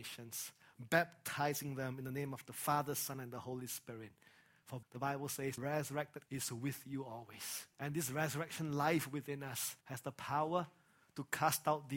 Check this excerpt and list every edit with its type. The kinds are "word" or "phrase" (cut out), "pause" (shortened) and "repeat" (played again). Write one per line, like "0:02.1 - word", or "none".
0:04.8 - word
0:05.6 - word
0:06.3 - word
0:07.7 - pause
0:09.8 - pause